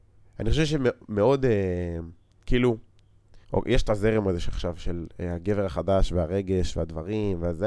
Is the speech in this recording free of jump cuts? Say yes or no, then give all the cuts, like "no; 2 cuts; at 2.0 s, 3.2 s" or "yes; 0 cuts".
no; 1 cut; at 3.4 s